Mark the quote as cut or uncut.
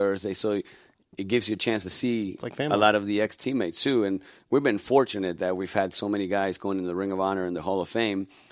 uncut